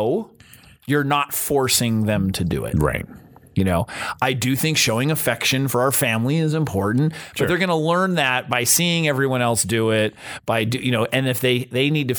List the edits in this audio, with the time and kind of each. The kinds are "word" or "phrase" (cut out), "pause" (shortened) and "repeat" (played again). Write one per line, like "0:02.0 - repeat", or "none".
none

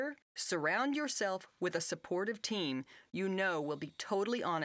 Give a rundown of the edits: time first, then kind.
none

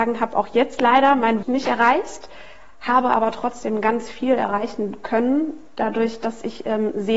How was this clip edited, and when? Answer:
0:01.4 - word

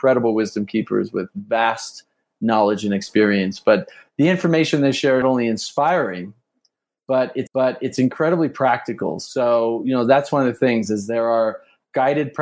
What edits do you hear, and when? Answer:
0:05.2 - phrase
0:07.5 - repeat

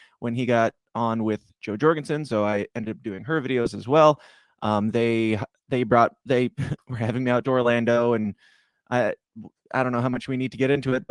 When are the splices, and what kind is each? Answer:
none

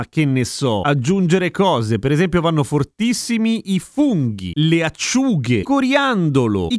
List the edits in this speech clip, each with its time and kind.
0:05.6 - word

